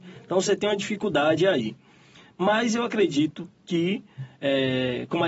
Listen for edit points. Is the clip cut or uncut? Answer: uncut